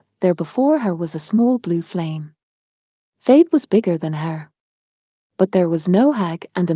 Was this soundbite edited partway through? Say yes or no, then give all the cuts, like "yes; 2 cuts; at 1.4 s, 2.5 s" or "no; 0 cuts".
no; 0 cuts